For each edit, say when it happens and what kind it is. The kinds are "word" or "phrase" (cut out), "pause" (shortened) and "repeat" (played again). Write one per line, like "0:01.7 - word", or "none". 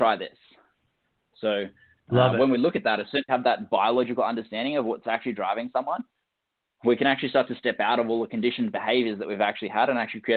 0:03.3 - phrase